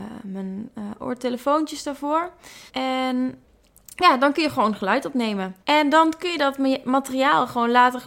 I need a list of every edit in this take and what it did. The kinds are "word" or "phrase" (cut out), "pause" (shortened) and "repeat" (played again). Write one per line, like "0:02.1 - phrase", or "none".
0:02.7 - pause
0:05.6 - pause